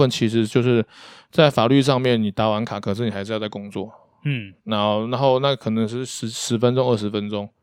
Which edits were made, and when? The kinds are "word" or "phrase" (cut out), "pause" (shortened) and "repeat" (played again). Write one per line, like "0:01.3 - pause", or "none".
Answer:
none